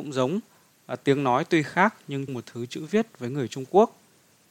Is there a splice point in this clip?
yes; 1 cut; at 2.3 s

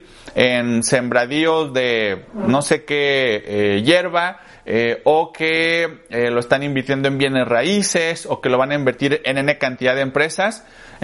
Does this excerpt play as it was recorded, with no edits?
yes; 0 cuts

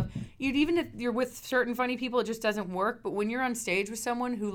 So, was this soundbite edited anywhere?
no; 0 cuts

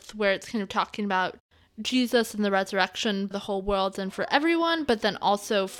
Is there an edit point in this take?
yes; 1 cut; at 3.3 s

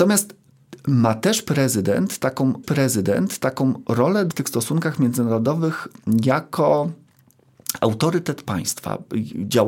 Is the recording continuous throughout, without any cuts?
no; 2 cuts; at 2.6 s, 4.3 s

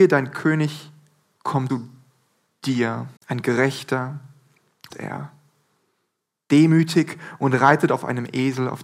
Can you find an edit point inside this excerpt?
yes; 3 cuts; at 1.7 s, 3.2 s, 4.9 s

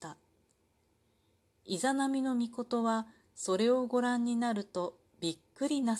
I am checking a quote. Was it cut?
no; 0 cuts

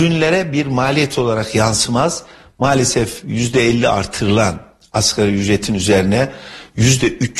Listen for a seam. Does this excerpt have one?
no; 0 cuts

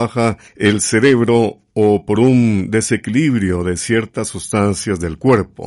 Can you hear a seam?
no; 0 cuts

